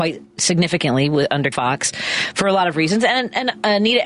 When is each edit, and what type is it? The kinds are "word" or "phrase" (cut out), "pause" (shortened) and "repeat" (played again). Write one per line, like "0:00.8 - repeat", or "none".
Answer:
0:01.5 - word